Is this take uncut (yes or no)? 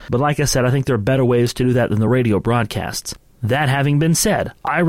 yes